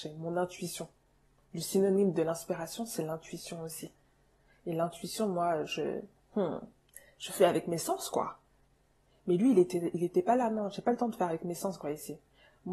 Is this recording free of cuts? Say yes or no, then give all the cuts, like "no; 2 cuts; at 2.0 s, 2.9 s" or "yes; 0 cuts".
yes; 0 cuts